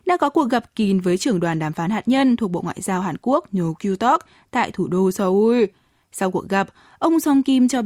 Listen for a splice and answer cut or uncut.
uncut